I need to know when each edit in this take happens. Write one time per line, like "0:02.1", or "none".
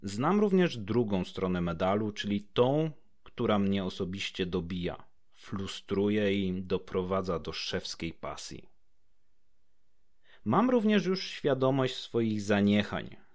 none